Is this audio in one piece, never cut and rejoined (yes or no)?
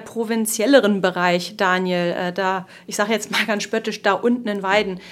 yes